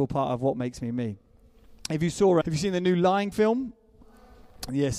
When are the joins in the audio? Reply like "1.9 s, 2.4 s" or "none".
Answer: 2.4 s, 3.3 s